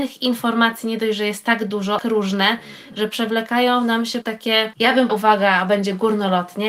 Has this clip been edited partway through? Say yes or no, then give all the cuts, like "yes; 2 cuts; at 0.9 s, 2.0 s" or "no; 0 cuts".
yes; 3 cuts; at 2.0 s, 4.2 s, 5.1 s